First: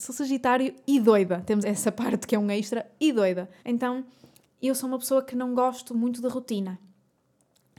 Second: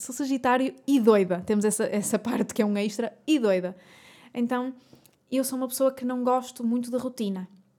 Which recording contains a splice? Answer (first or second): first